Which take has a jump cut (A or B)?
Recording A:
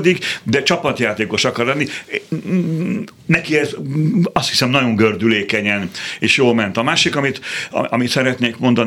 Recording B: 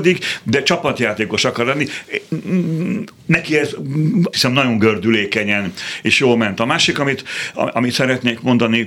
B